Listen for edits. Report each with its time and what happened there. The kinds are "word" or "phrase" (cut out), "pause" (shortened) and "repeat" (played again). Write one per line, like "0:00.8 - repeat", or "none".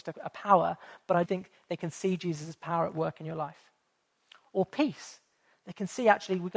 0:01.2 - word